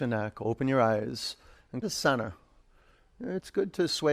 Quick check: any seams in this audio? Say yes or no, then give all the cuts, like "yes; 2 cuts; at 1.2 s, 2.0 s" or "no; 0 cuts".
yes; 1 cut; at 1.8 s